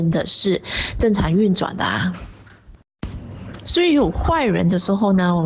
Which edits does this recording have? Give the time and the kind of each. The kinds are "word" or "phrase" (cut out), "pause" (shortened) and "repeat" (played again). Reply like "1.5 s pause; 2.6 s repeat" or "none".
none